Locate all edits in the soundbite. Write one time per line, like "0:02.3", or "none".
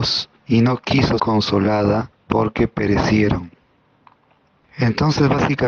0:01.2